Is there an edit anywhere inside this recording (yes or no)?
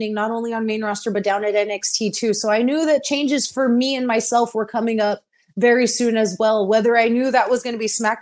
no